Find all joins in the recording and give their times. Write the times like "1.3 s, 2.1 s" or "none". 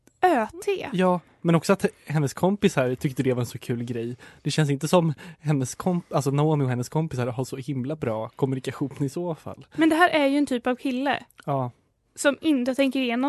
none